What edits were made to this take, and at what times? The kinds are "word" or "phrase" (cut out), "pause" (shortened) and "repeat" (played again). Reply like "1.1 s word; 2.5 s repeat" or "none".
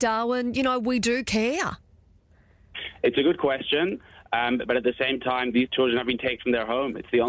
6.4 s word